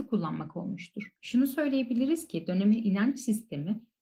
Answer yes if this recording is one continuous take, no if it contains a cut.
no